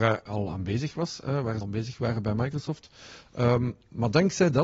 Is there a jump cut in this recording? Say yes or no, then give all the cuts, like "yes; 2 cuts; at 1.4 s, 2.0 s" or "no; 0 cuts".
yes; 1 cut; at 1.6 s